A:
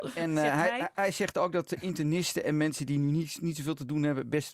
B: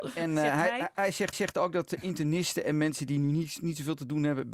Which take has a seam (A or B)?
B